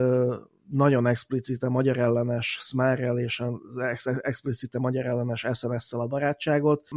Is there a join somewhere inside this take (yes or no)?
no